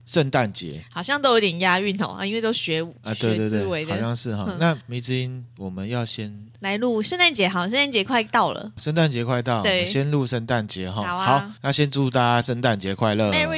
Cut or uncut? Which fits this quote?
cut